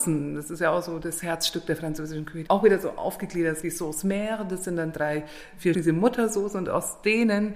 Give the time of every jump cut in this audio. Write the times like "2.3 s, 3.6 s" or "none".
2.5 s, 3.6 s, 5.7 s